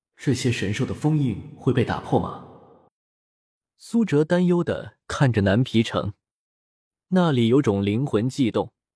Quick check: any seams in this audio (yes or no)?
no